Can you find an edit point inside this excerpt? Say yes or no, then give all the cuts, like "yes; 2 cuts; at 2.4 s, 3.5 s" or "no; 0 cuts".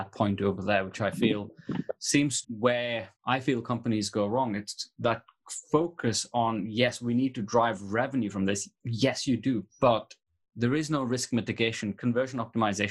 yes; 3 cuts; at 2.4 s, 3.2 s, 9.7 s